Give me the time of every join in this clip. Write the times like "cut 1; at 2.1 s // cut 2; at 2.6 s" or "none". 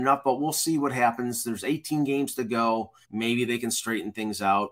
cut 1; at 3.0 s